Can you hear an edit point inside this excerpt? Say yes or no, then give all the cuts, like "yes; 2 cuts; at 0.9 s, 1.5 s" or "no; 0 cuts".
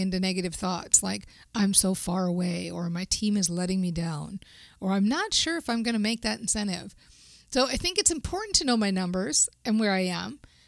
no; 0 cuts